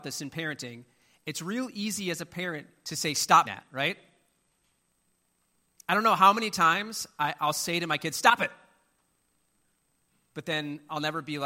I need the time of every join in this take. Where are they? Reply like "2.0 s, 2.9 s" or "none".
3.4 s